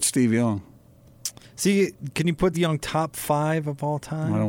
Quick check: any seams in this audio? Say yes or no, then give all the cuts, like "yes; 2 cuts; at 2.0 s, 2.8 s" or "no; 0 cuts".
yes; 2 cuts; at 1.4 s, 2.5 s